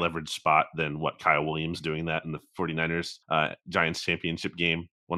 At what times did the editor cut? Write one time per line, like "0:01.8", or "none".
0:03.2